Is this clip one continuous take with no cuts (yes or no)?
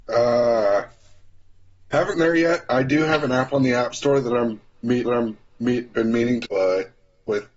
no